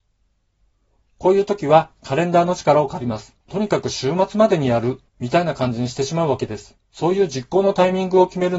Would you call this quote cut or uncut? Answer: cut